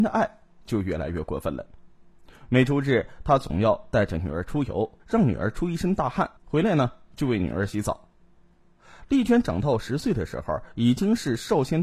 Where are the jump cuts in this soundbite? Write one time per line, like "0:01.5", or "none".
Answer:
0:05.0
0:06.4